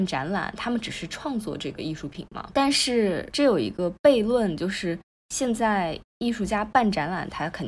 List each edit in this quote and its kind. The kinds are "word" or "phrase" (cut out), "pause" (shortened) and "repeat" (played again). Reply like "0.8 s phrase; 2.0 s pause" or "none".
6.1 s pause